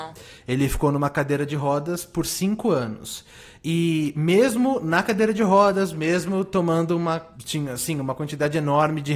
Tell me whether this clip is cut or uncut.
uncut